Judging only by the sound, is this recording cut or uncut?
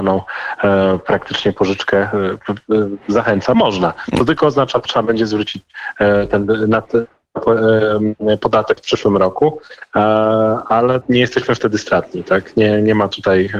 cut